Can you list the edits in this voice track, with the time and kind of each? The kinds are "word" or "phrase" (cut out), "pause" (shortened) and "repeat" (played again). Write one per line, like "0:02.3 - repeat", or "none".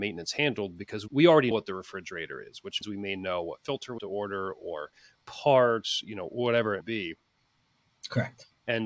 0:01.1 - word
0:01.5 - word
0:02.8 - word
0:04.0 - word
0:06.8 - word